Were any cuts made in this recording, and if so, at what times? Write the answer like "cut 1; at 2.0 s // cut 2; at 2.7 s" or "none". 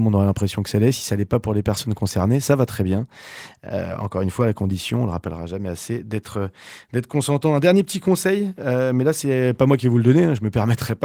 none